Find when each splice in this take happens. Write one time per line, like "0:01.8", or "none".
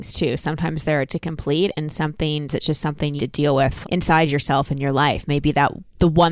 0:01.1
0:02.5
0:03.2
0:03.8

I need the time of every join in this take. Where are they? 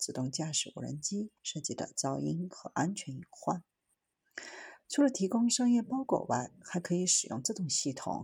0:01.4

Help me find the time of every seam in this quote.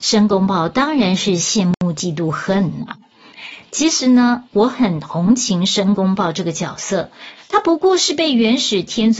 0:04.4

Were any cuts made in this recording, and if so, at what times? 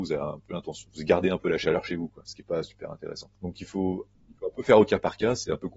0:03.3

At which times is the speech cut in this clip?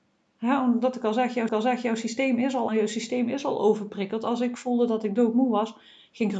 0:01.5
0:02.7

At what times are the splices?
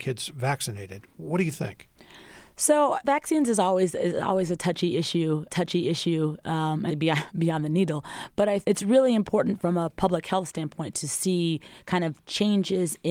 0:03.0
0:05.5
0:06.9
0:08.6

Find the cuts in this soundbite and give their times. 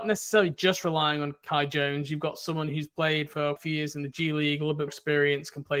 0:03.6
0:04.9

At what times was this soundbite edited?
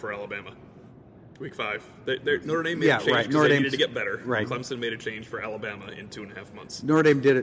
0:01.3

